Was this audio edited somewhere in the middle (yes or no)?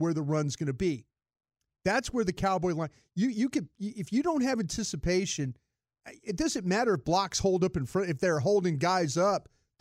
no